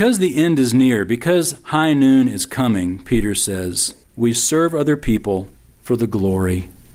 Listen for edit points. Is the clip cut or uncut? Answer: cut